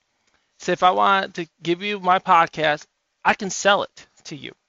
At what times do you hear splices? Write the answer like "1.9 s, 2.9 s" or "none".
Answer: none

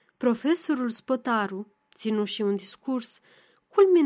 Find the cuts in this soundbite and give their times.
none

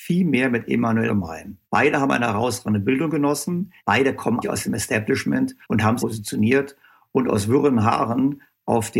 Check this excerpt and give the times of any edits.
1.1 s, 1.6 s, 3.8 s, 4.4 s, 5.6 s, 6.0 s

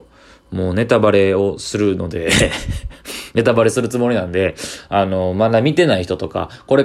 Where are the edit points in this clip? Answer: none

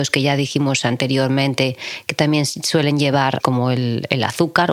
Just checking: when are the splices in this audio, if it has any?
3.4 s

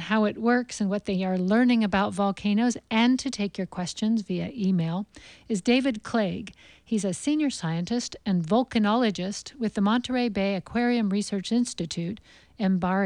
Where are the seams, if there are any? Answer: none

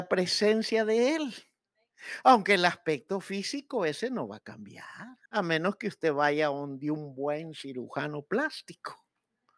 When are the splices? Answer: 5.3 s

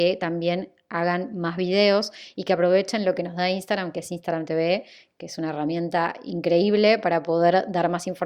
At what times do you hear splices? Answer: none

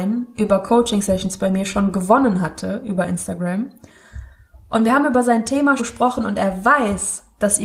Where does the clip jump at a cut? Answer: 5.8 s

